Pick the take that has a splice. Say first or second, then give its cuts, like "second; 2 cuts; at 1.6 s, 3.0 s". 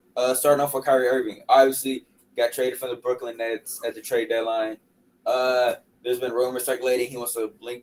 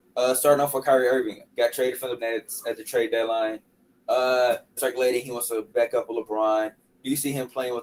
second; 4 cuts; at 1.5 s, 2.2 s, 4.8 s, 5.7 s